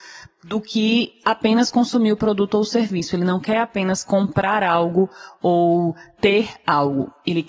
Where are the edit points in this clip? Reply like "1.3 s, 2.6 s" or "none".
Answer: none